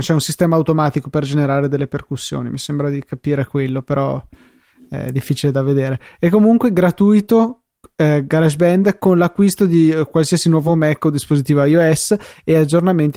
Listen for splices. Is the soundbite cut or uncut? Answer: uncut